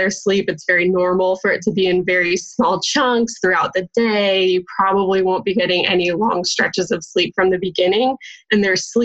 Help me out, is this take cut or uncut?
uncut